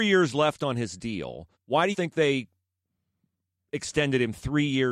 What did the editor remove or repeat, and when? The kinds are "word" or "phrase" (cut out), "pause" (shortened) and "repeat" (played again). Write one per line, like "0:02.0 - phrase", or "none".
0:01.5 - pause
0:01.9 - word